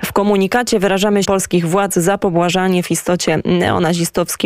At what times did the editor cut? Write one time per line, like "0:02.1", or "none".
0:01.2